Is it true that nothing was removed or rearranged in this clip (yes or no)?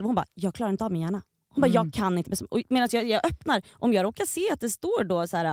yes